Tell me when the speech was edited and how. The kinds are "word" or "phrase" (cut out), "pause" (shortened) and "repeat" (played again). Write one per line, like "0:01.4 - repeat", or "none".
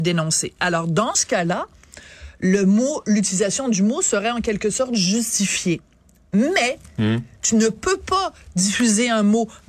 none